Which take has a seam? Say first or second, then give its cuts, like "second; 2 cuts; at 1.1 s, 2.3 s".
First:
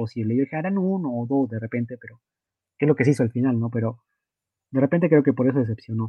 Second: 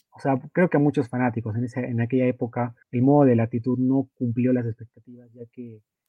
second; 1 cut; at 2.8 s